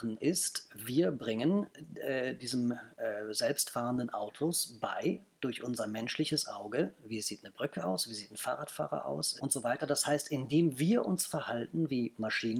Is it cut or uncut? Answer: cut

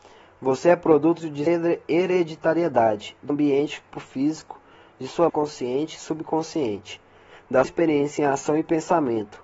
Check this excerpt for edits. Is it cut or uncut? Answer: cut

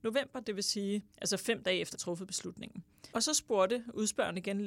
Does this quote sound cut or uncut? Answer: cut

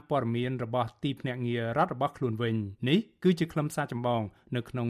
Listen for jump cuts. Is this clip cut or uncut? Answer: cut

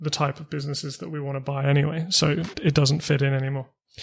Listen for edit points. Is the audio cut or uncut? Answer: cut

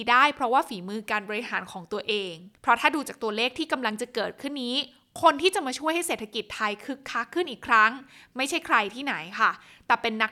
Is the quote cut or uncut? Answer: cut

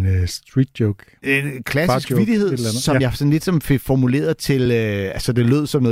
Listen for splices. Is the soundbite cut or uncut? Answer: uncut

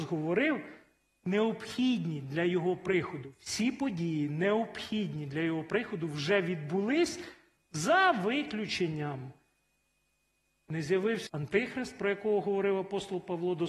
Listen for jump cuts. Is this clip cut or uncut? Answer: cut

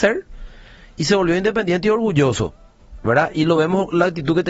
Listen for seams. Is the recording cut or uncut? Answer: uncut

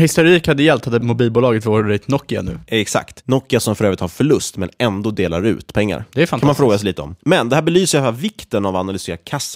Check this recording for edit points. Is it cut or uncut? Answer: cut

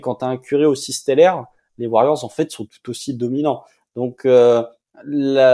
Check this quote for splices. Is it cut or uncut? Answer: uncut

